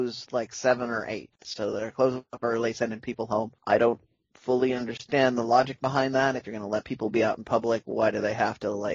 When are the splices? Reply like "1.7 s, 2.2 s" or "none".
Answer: 1.4 s, 3.6 s